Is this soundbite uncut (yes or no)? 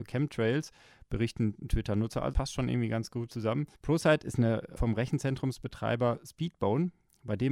no